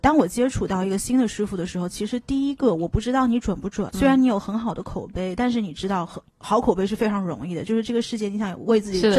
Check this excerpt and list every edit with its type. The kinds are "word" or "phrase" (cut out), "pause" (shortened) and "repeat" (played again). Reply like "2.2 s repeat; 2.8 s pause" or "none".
3.9 s word; 6.3 s pause